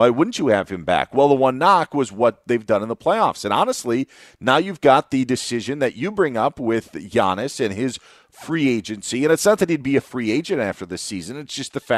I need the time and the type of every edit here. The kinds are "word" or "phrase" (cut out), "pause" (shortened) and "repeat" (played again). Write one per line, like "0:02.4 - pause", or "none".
none